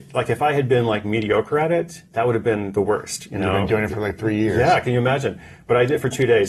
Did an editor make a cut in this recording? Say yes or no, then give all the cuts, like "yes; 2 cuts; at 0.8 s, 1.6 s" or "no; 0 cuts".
yes; 1 cut; at 2.0 s